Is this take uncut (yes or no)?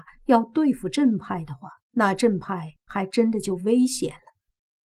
no